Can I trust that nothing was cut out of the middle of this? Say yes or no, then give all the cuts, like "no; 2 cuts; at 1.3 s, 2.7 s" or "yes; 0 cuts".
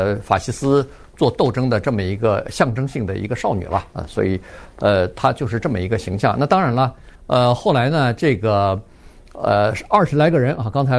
no; 1 cut; at 7.1 s